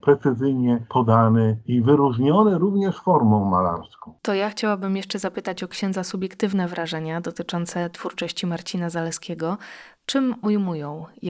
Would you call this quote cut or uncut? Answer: uncut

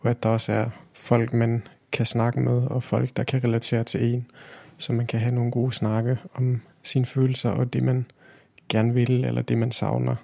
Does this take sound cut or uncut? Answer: uncut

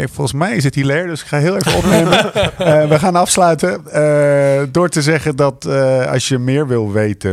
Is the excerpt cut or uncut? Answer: uncut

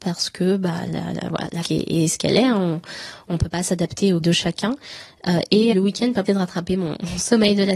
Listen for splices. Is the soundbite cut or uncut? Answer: cut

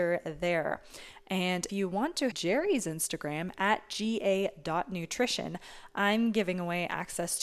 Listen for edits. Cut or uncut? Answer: cut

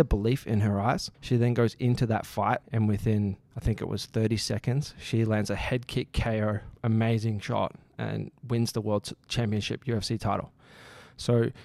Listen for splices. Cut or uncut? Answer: cut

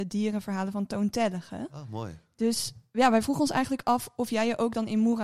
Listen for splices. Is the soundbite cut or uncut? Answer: uncut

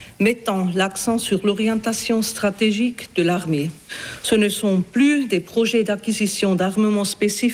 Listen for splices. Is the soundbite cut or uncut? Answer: uncut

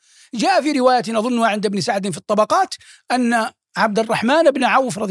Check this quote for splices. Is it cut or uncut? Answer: uncut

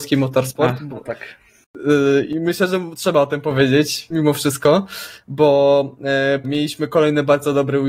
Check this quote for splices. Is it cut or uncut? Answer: cut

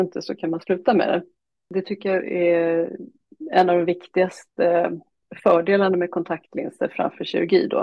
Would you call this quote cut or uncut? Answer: uncut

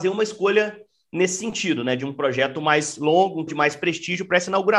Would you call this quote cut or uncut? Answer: cut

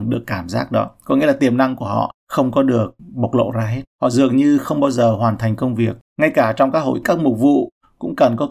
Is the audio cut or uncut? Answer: cut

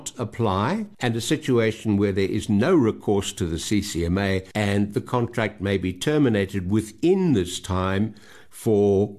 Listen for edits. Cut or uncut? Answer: cut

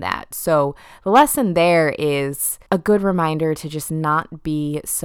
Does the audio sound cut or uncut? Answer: cut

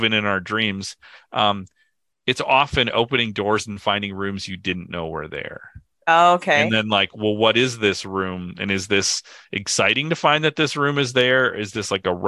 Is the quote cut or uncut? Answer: uncut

